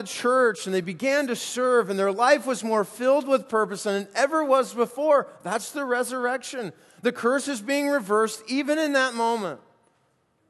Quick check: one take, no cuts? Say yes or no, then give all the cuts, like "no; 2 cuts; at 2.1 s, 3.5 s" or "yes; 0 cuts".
yes; 0 cuts